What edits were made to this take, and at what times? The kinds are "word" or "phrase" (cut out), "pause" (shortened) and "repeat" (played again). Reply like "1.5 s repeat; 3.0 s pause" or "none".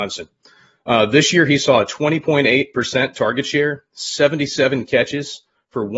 none